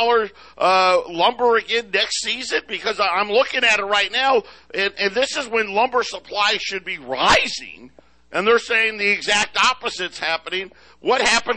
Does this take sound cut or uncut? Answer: uncut